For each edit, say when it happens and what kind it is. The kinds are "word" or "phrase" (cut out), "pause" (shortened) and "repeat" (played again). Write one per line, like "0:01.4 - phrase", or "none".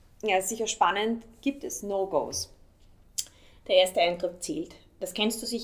none